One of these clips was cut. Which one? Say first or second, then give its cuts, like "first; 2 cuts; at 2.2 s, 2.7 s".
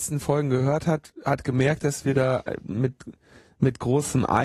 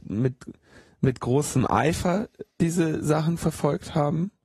second; 1 cut; at 2.5 s